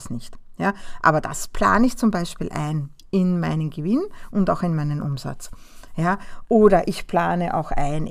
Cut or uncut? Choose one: uncut